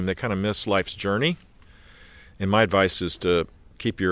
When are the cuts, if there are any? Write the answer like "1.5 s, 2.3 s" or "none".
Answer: none